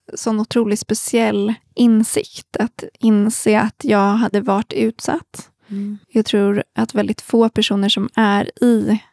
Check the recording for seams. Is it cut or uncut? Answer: cut